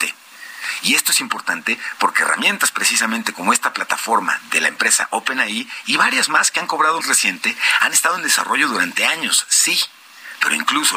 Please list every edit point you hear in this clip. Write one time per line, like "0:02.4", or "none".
0:07.0